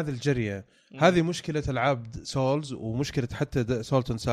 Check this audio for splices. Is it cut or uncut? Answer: uncut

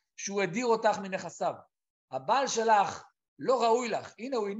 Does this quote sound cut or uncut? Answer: uncut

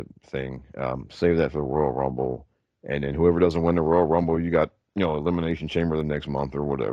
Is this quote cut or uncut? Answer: uncut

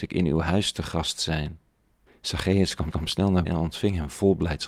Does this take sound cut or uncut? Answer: cut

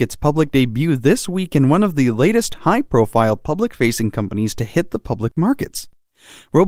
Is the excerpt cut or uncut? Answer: uncut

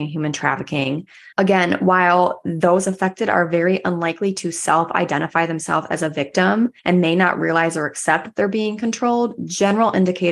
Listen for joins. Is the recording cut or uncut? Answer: cut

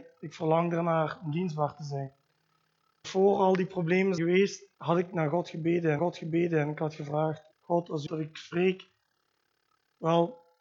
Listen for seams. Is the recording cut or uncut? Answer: cut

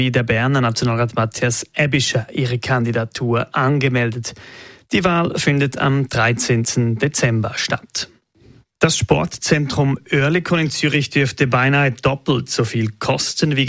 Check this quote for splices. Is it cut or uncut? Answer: uncut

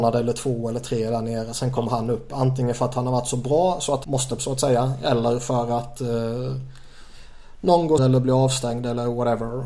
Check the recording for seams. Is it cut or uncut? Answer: cut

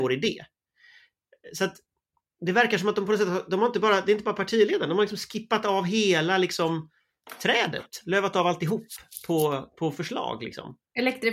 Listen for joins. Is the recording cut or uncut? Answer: uncut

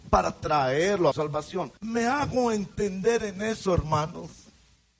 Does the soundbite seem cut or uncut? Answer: cut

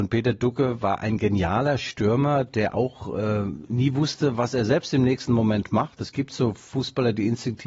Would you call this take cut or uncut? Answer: uncut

